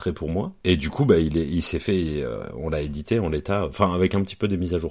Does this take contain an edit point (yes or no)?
no